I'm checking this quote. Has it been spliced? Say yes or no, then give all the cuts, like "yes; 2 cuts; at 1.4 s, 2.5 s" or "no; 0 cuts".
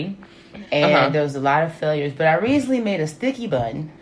no; 0 cuts